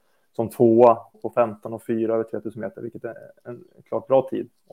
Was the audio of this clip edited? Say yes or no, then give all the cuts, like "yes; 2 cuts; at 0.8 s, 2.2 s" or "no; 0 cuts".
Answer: yes; 1 cut; at 1.1 s